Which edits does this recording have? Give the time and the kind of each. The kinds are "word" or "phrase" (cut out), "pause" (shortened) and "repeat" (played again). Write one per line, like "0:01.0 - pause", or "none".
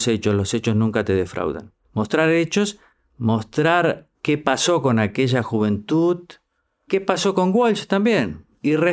0:01.8 - pause
0:04.1 - word
0:06.9 - word